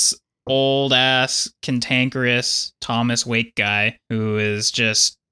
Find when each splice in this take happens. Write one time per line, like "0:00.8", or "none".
0:04.0